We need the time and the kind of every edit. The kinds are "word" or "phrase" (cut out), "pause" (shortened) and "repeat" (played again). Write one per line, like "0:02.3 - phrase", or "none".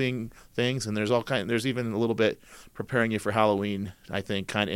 none